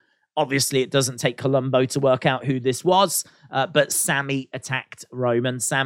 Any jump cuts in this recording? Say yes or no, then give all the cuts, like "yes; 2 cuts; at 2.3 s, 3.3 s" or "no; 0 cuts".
no; 0 cuts